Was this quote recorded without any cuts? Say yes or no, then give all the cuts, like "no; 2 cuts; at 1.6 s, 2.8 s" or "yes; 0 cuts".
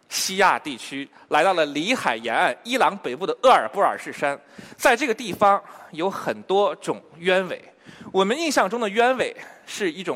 yes; 0 cuts